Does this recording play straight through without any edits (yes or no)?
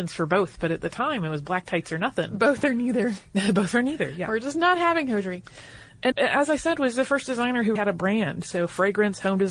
no